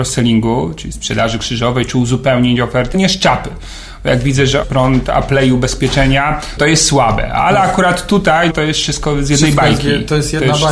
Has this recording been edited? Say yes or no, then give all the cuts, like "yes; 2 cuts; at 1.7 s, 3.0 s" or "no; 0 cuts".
yes; 4 cuts; at 2.9 s, 4.6 s, 6.6 s, 8.5 s